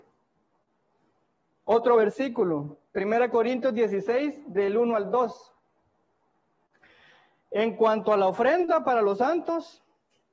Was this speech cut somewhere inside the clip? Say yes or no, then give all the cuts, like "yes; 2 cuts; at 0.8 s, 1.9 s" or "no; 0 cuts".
no; 0 cuts